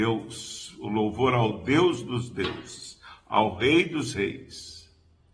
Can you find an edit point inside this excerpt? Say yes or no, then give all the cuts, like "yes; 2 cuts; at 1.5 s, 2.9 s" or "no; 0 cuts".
no; 0 cuts